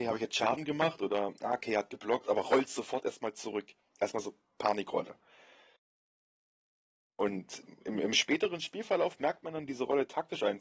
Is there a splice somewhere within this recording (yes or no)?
no